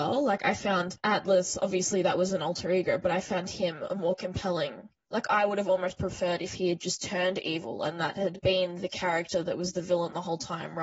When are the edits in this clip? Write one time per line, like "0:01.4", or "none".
none